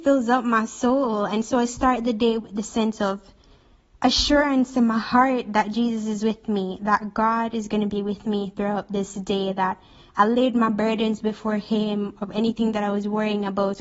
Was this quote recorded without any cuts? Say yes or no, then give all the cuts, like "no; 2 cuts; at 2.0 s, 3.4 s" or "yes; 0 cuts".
yes; 0 cuts